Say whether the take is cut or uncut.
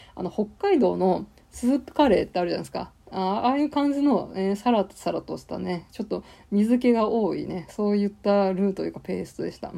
uncut